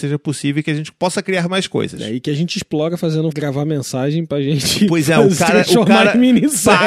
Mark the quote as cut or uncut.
cut